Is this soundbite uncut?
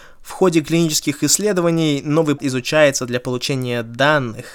no; 1 cut; at 2.4 s

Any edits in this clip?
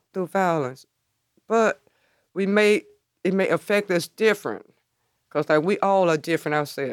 no; 0 cuts

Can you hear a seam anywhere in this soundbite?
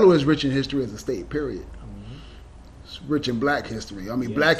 no; 0 cuts

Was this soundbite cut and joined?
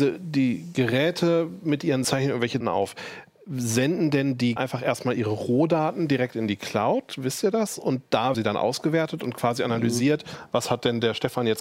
yes; 4 cuts; at 2.0 s, 2.6 s, 4.6 s, 8.3 s

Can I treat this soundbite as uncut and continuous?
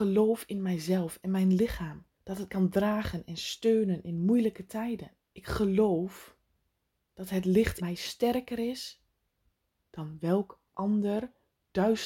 no; 4 cuts; at 2.1 s, 2.5 s, 5.2 s, 7.8 s

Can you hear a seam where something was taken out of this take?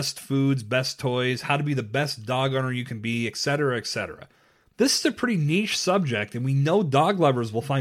no; 0 cuts

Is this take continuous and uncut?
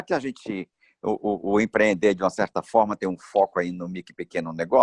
yes; 0 cuts

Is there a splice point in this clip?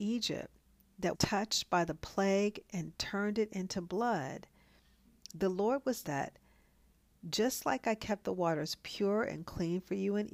yes; 2 cuts; at 1.1 s, 6.0 s

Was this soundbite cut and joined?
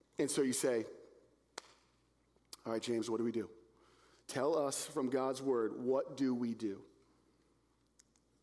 no; 0 cuts

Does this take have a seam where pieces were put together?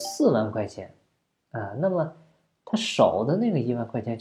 no; 0 cuts

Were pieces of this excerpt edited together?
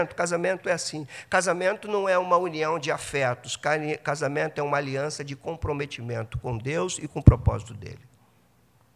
no; 0 cuts

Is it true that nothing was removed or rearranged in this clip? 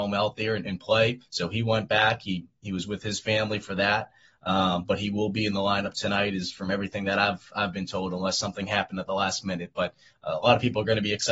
no; 1 cut; at 1.3 s

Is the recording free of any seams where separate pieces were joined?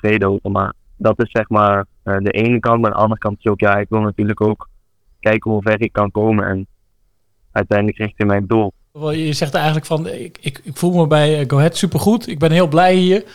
yes; 0 cuts

